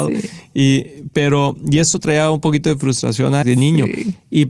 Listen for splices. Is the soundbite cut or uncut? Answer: cut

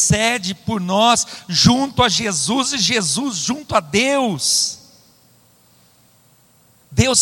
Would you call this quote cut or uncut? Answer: uncut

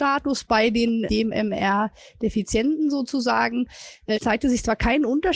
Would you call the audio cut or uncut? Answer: cut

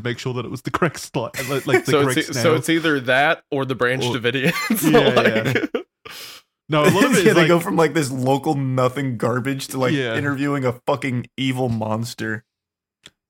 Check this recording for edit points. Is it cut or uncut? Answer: uncut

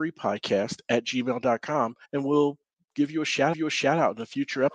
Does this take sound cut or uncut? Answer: cut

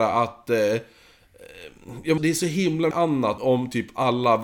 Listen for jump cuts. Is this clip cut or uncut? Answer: cut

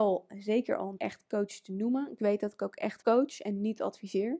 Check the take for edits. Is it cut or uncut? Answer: cut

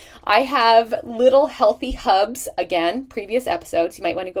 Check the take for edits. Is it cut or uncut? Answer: uncut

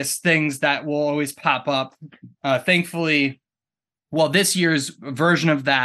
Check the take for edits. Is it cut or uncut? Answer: uncut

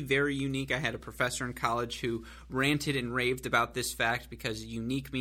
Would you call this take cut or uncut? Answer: uncut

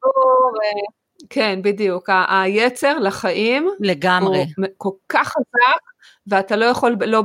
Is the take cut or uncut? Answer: uncut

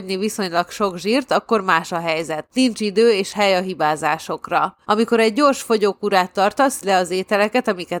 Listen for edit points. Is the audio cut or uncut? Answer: cut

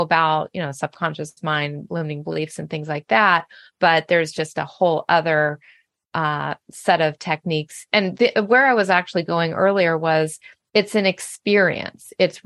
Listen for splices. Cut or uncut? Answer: uncut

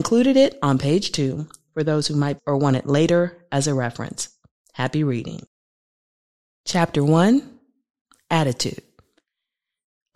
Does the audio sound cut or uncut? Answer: cut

